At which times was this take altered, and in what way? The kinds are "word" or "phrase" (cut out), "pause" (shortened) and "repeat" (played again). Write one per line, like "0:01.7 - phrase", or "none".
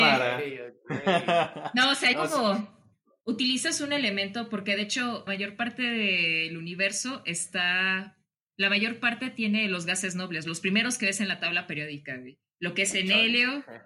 0:02.1 - word
0:05.3 - word